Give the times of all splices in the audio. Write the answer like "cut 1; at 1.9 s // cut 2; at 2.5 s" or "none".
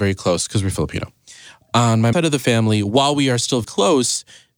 cut 1; at 2.1 s // cut 2; at 3.6 s